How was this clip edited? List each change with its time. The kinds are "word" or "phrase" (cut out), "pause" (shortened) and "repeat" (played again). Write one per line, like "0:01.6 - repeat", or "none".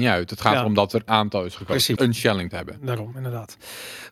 0:01.1 - word
0:02.0 - word
0:02.5 - word